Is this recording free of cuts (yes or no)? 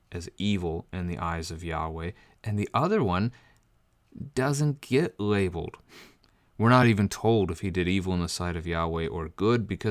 yes